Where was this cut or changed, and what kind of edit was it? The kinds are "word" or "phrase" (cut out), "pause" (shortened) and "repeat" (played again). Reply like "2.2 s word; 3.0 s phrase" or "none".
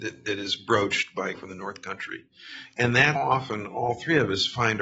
1.3 s word; 3.2 s word